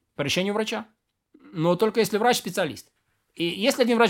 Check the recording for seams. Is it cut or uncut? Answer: uncut